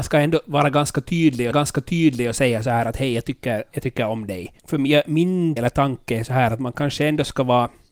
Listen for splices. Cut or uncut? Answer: cut